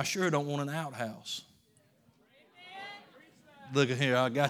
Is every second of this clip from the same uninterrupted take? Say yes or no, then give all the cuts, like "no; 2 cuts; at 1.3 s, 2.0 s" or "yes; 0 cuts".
yes; 0 cuts